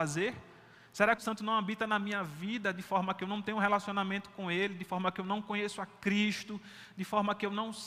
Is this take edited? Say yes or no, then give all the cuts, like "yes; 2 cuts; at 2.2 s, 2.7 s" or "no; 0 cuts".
yes; 1 cut; at 1.2 s